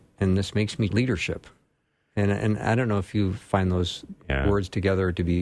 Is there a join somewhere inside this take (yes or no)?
yes